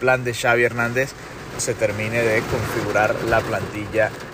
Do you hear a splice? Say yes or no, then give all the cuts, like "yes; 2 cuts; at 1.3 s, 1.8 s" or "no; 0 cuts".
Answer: yes; 1 cut; at 1.6 s